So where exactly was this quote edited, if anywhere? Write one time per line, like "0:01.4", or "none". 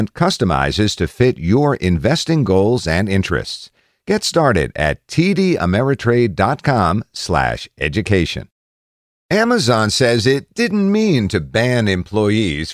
none